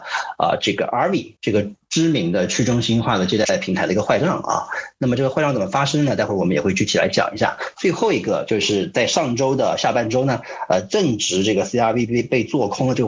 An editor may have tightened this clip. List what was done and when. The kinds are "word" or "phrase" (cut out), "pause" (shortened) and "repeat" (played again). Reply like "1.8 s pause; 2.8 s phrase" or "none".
1.4 s pause